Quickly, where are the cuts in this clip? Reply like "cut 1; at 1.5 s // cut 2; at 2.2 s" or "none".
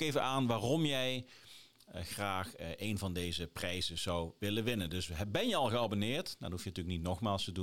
none